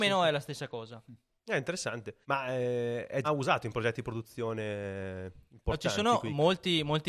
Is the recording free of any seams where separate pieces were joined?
no; 3 cuts; at 1.4 s, 2.2 s, 3.2 s

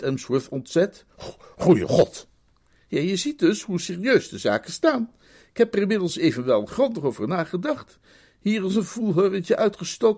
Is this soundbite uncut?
yes; 0 cuts

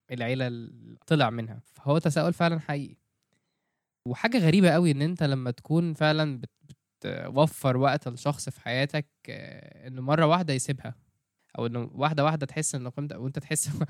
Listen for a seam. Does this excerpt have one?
no; 0 cuts

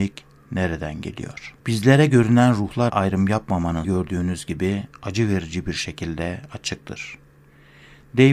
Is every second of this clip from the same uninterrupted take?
no; 3 cuts; at 1.6 s, 2.9 s, 3.8 s

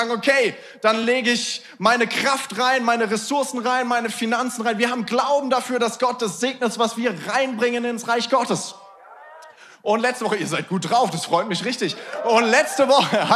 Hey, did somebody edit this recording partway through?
no; 0 cuts

